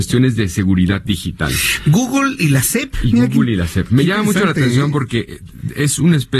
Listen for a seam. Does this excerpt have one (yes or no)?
no